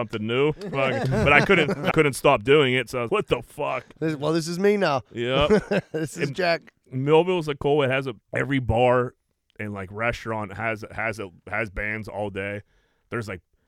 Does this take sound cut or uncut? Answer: cut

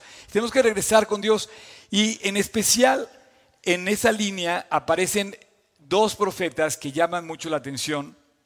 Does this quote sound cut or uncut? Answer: uncut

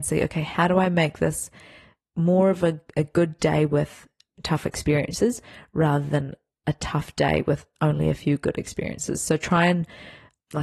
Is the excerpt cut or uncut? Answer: uncut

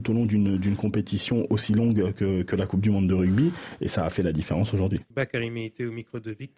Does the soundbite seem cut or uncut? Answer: cut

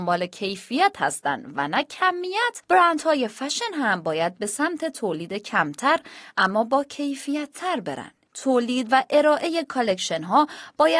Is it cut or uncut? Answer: uncut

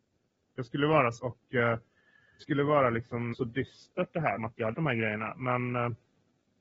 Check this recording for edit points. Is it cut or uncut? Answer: cut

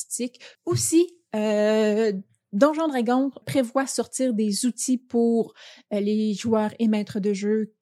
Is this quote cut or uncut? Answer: cut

